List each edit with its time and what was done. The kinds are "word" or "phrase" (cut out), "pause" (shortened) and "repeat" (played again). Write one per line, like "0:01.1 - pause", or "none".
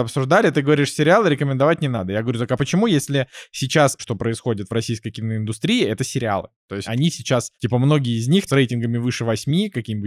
0:04.0 - word
0:06.8 - word
0:07.5 - pause
0:08.5 - word